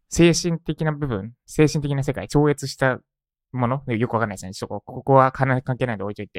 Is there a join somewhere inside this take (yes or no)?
no